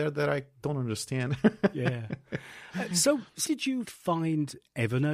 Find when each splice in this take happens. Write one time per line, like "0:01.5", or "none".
0:03.4
0:03.8